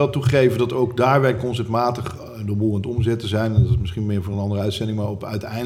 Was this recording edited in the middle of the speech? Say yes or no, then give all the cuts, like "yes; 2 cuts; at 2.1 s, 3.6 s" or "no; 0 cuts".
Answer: no; 0 cuts